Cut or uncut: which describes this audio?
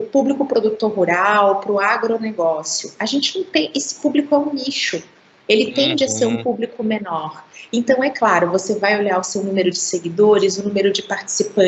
uncut